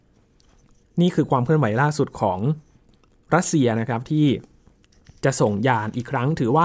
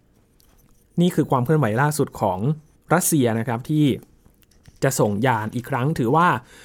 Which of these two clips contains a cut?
second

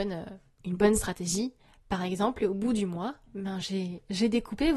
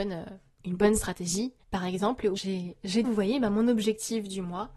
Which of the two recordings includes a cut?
second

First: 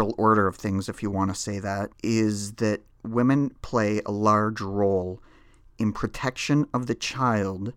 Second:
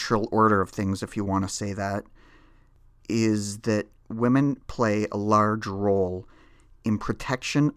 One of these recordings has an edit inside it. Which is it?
first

